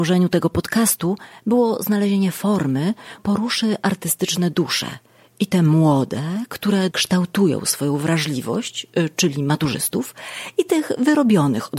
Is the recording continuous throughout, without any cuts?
no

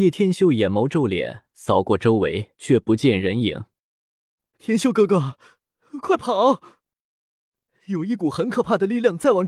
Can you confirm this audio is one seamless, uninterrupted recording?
no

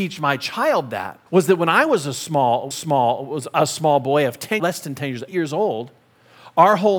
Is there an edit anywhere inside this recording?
yes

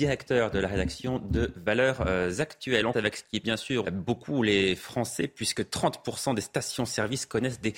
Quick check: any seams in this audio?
yes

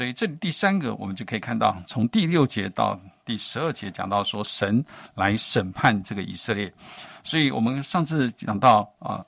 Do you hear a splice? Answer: no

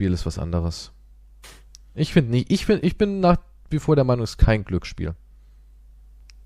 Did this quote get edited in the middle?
no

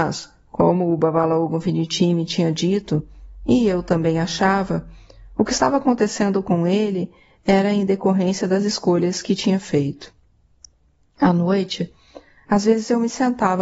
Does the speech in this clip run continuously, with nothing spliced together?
yes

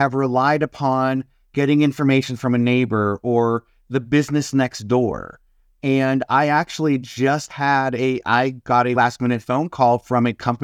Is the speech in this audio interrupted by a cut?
yes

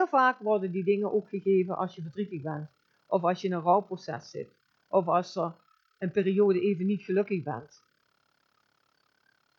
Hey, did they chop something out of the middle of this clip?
no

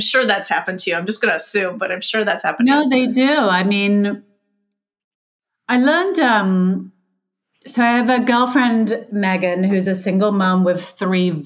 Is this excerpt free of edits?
yes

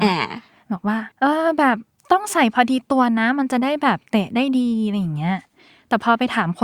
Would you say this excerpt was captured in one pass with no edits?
no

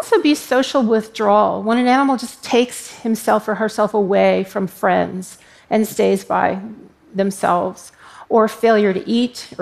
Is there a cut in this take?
no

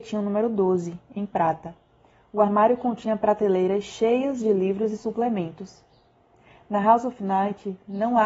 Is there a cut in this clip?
no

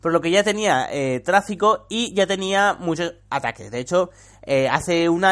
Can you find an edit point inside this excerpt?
no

